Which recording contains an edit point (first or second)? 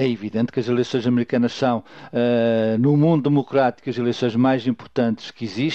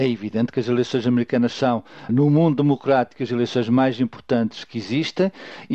second